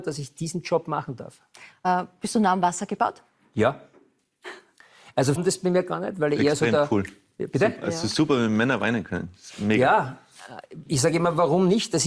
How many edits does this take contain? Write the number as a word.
one